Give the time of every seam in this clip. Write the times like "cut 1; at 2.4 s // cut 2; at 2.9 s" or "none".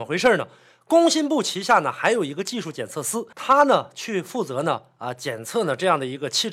cut 1; at 3.3 s